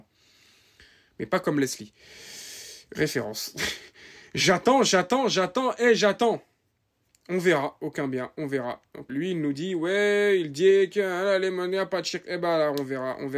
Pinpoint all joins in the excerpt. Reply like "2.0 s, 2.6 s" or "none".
9.1 s